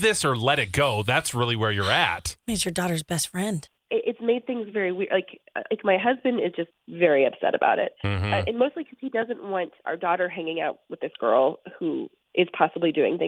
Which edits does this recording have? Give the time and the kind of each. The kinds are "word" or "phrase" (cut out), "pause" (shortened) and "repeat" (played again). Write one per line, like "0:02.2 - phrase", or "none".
none